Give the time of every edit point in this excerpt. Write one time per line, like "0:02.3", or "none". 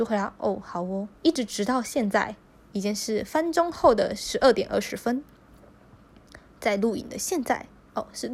0:01.2